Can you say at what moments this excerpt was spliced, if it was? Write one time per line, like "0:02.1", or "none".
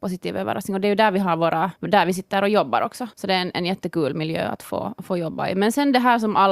0:01.8
0:03.1